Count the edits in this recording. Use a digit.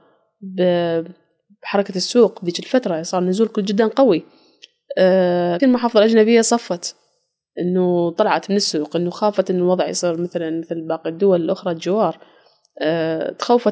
1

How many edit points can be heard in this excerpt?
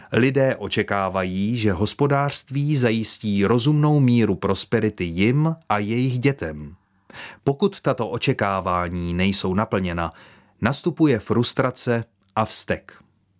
0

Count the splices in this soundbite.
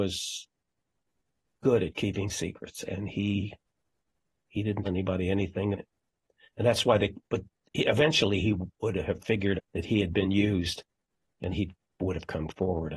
4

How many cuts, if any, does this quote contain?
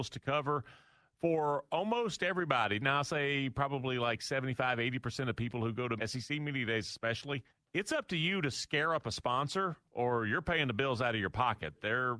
2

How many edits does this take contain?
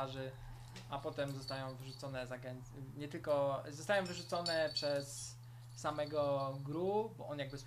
0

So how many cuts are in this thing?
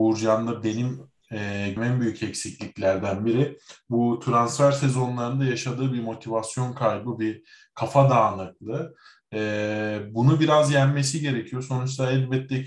1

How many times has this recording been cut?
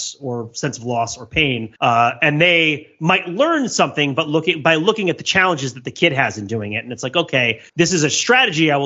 2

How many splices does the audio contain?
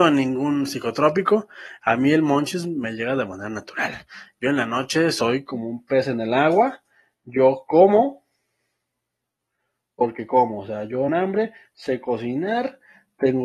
1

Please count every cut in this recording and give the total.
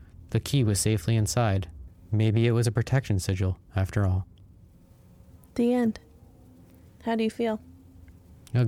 0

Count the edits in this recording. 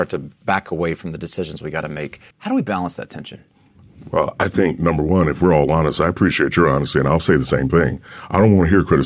1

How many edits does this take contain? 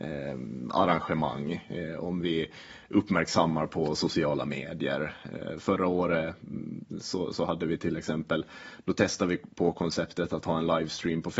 0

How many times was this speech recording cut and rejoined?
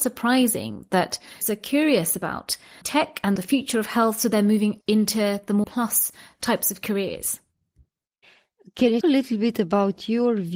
6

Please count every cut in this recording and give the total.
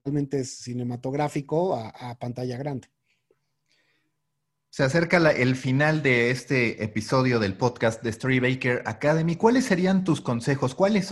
0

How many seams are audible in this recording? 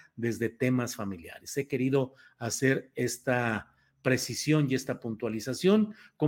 0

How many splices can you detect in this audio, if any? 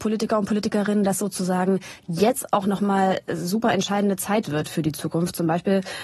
0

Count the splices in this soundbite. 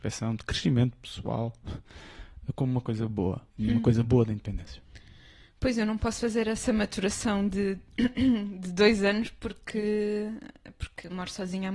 1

